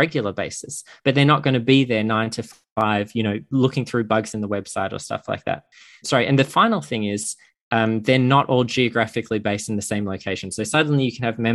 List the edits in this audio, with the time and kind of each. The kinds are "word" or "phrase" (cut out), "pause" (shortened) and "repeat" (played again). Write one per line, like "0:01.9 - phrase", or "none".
0:06.0 - word